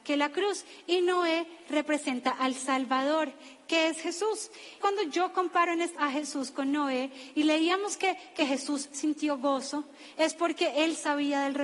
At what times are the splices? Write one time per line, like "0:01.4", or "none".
0:04.8
0:06.0